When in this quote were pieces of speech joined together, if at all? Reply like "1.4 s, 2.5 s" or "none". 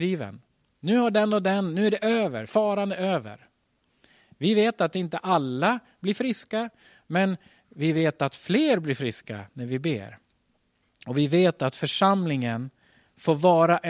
none